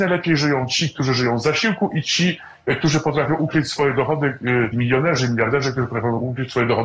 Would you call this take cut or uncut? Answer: cut